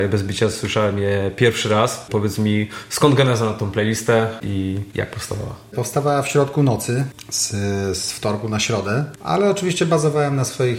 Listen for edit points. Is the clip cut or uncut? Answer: uncut